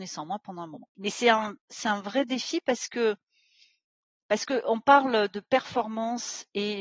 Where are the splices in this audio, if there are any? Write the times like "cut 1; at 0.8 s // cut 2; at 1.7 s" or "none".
none